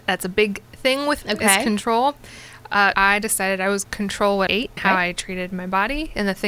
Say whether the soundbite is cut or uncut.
cut